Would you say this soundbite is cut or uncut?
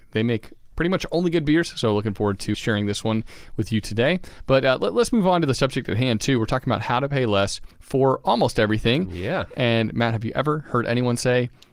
cut